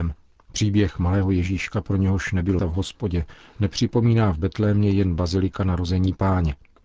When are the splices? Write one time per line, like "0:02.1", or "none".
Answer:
0:02.6